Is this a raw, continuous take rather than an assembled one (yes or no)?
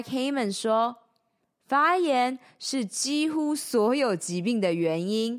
yes